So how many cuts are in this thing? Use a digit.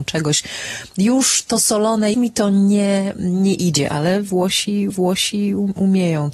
2